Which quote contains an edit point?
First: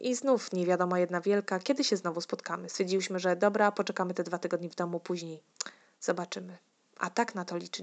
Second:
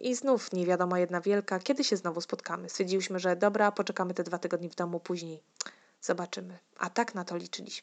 second; 1 cut; at 6.7 s

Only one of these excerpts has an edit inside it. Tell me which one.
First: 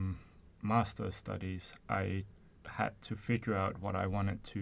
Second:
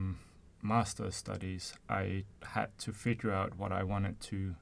second; 1 cut; at 2.4 s

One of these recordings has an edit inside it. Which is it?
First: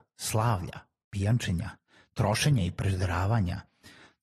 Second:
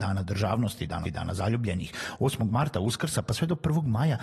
second; 1 cut; at 1.0 s

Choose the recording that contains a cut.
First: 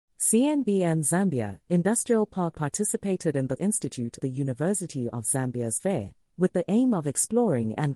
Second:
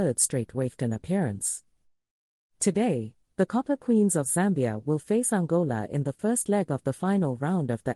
first; 4 cuts; at 2.5 s, 3.6 s, 4.2 s, 5.8 s

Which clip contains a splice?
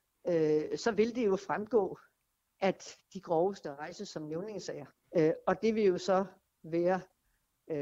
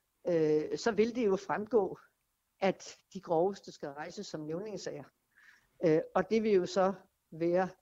first; 2 cuts; at 3.6 s, 5.0 s

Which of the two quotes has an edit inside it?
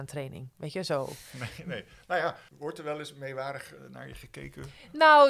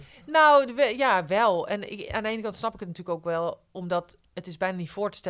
first; 1 cut; at 2.5 s

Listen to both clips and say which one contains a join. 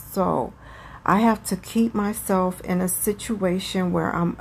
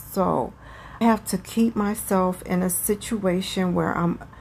second; 1 cut; at 1.0 s

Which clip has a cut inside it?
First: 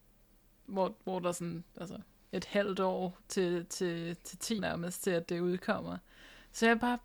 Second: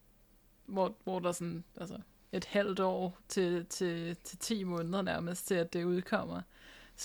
first; 1 cut; at 4.6 s

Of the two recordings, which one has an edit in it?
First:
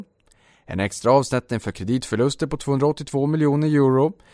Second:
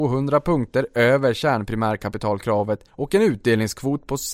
second; 1 cut; at 2.9 s

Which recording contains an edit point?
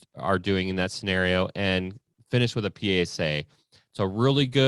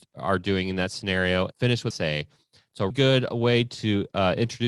second; 3 cuts; at 1.5 s, 1.9 s, 2.9 s

